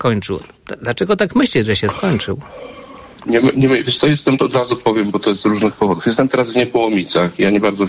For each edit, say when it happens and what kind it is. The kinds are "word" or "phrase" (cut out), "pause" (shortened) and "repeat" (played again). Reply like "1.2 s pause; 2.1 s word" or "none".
4.4 s word